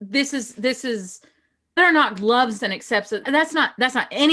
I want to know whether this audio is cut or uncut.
cut